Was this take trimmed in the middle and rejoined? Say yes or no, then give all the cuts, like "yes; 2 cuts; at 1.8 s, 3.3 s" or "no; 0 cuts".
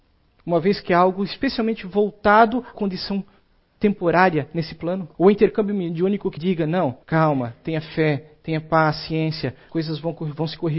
yes; 5 cuts; at 2.7 s, 5.1 s, 6.4 s, 7.0 s, 9.7 s